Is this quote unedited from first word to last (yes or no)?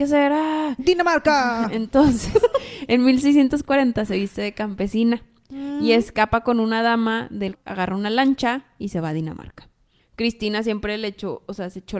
no